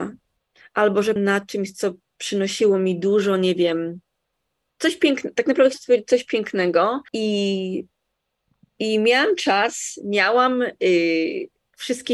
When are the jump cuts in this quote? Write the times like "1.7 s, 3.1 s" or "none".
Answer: 1.2 s, 4.3 s, 5.7 s, 7.1 s